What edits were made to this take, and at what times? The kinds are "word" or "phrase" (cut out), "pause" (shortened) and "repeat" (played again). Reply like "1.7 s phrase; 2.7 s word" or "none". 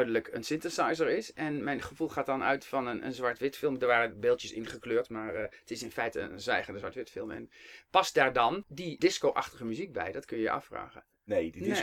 9.0 s word